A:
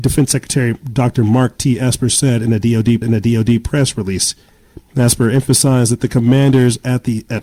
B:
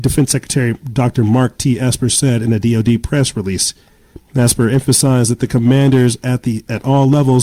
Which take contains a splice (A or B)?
A